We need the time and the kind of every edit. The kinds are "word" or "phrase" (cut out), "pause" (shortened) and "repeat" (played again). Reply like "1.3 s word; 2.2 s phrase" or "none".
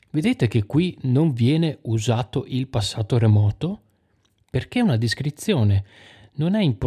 none